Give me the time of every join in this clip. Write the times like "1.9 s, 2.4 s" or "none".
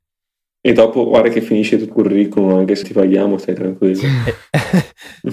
1.9 s, 2.8 s